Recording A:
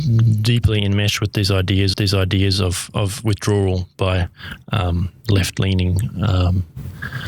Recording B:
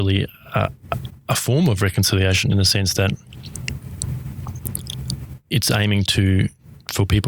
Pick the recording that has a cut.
A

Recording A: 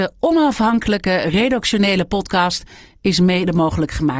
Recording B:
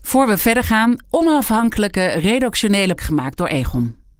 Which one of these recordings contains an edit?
B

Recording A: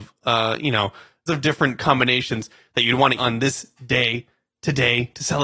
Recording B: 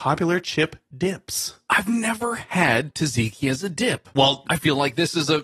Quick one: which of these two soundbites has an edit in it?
A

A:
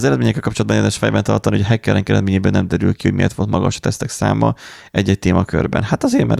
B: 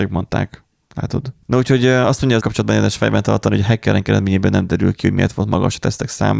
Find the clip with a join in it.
B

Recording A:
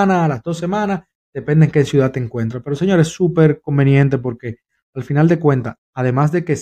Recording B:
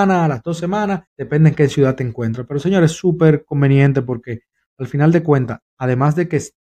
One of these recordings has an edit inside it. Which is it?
B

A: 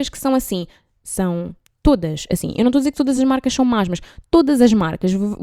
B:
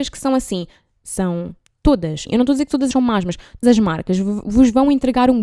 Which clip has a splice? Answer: B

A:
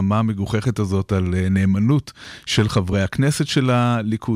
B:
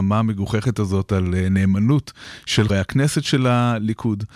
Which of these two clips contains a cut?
B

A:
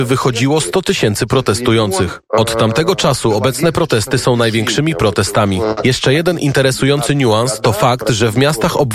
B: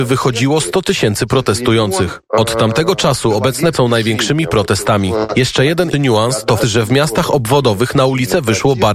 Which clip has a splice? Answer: B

